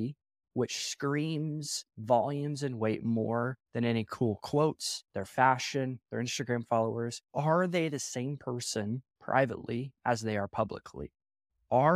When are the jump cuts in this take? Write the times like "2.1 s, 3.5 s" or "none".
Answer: 1.9 s, 3.6 s, 5.1 s, 7.3 s